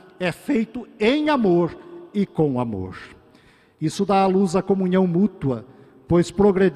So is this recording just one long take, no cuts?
yes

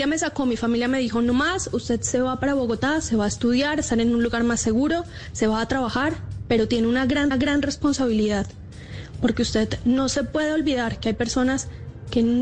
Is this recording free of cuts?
no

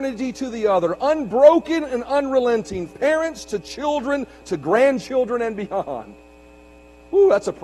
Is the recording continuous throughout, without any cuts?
no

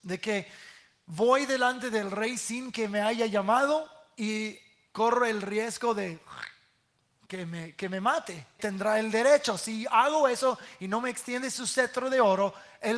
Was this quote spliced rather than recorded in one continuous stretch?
yes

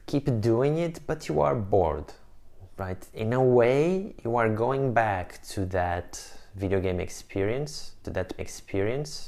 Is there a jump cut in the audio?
yes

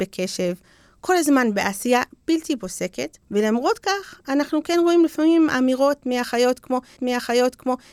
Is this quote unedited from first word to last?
no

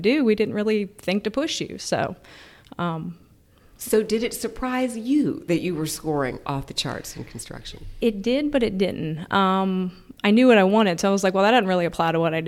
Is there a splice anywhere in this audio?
no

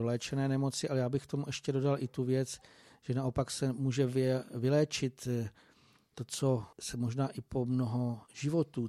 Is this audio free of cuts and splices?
no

